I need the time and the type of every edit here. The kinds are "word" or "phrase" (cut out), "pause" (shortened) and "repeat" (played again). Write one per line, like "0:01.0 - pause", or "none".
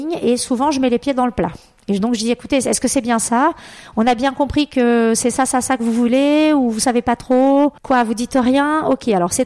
0:07.8 - pause